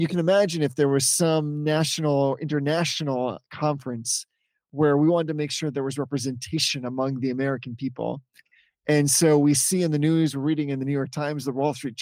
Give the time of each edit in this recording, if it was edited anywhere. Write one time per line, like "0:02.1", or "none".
none

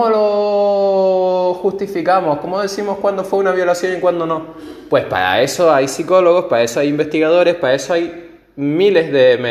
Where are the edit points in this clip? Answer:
none

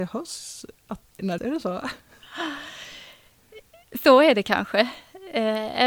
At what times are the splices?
0:01.0
0:01.4

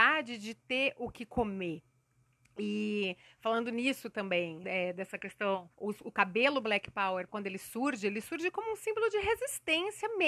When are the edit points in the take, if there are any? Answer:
0:04.6
0:05.7
0:07.3

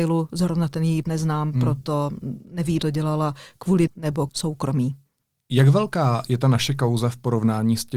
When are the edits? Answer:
0:01.0
0:02.8
0:03.9
0:04.3

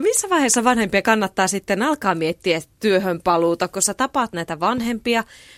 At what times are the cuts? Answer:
none

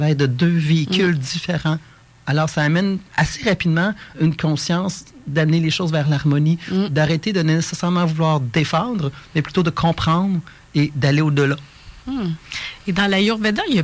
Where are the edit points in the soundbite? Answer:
0:03.1
0:04.1
0:12.0

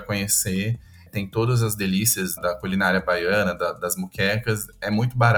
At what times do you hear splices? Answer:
0:02.4

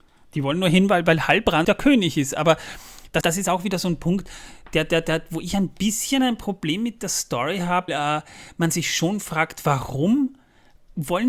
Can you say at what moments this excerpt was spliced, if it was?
0:01.6
0:03.2
0:07.9

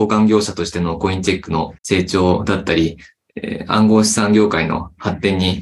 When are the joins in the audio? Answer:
0:01.8

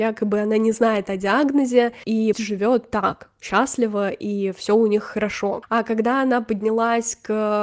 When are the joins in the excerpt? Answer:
0:02.3

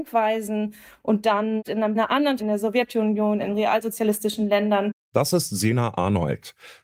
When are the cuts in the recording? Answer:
0:01.6
0:02.0
0:02.4

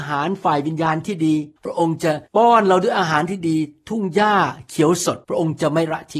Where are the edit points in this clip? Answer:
0:01.6
0:02.3
0:05.2

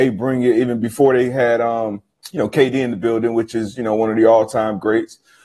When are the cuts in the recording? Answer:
0:02.1

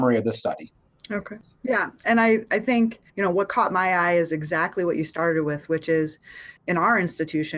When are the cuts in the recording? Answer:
0:03.1
0:06.6

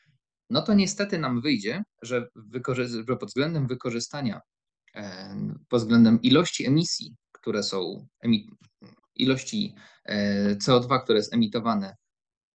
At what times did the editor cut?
0:09.0

